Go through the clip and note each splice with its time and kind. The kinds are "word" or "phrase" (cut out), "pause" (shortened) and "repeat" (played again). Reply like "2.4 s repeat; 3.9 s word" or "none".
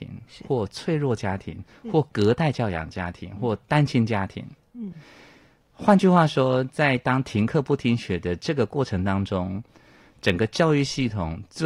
none